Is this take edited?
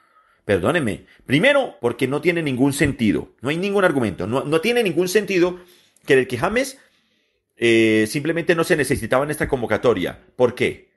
yes; 1 cut; at 1.8 s

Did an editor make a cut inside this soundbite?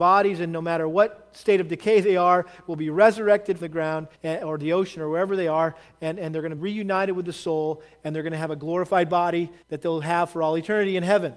yes; 4 cuts; at 3.6 s, 4.1 s, 6.6 s, 9.6 s

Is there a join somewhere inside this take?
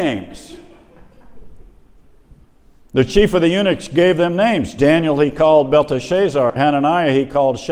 no; 0 cuts

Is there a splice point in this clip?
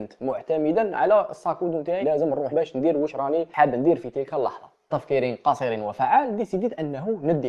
yes; 3 cuts; at 2.0 s, 2.5 s, 4.9 s

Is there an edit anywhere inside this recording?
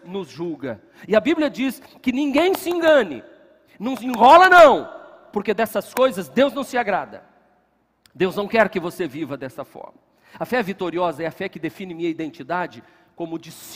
no; 0 cuts

